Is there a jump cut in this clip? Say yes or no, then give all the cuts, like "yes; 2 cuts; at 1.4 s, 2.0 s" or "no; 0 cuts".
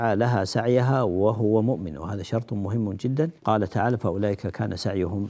yes; 1 cut; at 3.4 s